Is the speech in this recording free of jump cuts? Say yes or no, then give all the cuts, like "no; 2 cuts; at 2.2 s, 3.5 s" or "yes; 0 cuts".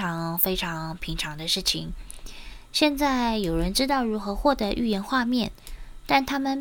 yes; 0 cuts